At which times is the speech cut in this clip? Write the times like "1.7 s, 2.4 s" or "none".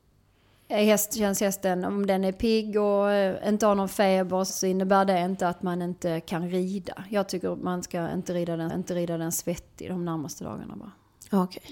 4.5 s, 8.7 s